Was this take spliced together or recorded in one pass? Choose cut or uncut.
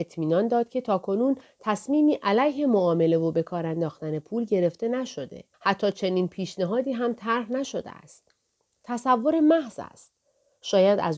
cut